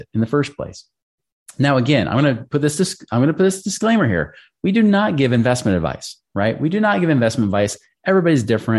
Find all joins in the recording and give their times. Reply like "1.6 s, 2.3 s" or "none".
none

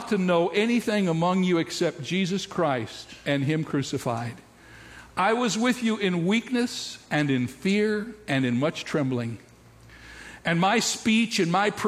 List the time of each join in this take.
none

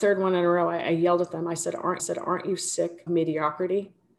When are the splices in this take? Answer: 2.0 s, 3.1 s

